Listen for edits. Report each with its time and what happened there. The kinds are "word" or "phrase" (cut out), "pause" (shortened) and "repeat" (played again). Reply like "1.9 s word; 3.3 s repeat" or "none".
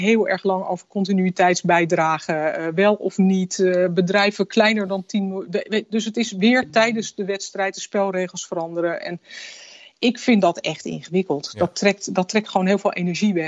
none